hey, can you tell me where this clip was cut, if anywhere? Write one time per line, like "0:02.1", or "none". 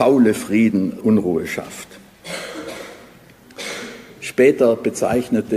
0:01.0